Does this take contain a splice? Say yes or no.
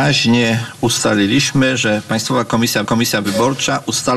yes